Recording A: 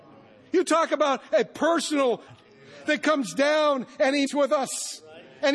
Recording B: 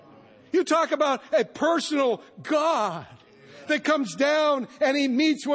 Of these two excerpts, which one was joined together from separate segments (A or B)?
A